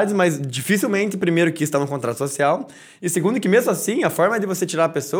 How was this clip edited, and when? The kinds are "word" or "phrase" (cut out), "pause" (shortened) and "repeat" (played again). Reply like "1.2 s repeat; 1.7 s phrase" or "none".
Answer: none